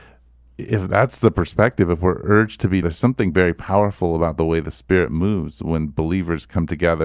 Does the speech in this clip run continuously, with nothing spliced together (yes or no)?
no